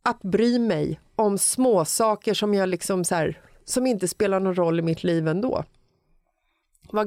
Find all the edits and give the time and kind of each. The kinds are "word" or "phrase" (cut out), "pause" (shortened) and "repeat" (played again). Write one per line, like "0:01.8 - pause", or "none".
none